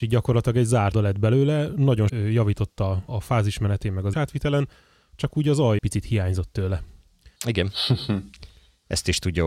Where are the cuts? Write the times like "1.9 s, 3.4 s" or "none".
0.9 s, 2.1 s, 3.1 s, 4.1 s, 5.8 s, 7.4 s